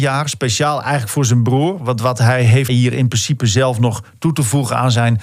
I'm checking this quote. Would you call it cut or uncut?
cut